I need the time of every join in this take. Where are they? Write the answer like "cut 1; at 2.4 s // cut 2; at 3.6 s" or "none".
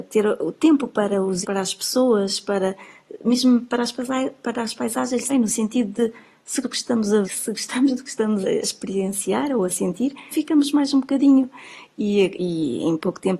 cut 1; at 1.4 s // cut 2; at 5.3 s // cut 3; at 6.6 s // cut 4; at 7.2 s // cut 5; at 8.4 s // cut 6; at 10.3 s